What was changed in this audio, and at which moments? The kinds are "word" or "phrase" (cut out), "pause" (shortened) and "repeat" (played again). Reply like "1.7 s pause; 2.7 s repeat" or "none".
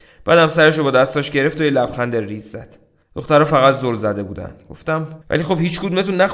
3.0 s pause; 5.2 s pause